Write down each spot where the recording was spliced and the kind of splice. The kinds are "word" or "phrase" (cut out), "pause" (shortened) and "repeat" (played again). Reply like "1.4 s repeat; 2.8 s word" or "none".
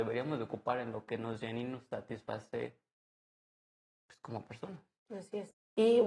none

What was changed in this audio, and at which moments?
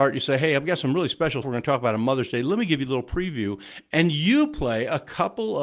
1.4 s word

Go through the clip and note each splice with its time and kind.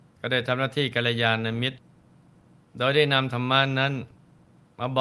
none

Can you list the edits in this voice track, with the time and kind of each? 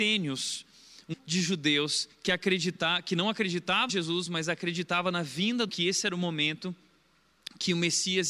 1.1 s word; 2.1 s pause; 3.9 s word; 5.7 s phrase

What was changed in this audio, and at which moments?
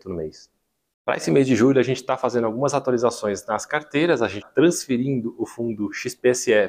4.4 s word

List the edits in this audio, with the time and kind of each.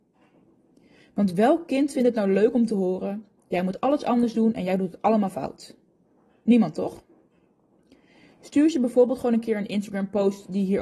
none

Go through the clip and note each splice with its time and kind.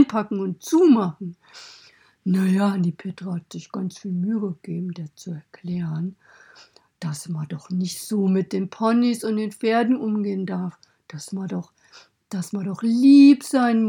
none

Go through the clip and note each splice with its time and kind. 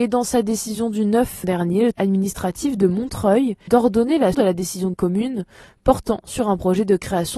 1.4 s word; 1.9 s word; 3.7 s word; 4.3 s word; 4.9 s word

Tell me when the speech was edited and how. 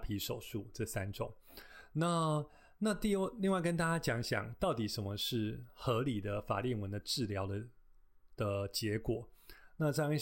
none

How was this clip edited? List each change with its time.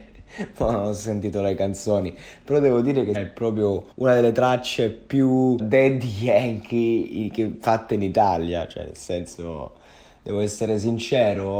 3.1 s phrase; 3.9 s pause; 5.6 s word

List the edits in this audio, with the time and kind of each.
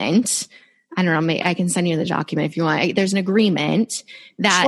none

